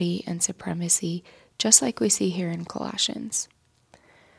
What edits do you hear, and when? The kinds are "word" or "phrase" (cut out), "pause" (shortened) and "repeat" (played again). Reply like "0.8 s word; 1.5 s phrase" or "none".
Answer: none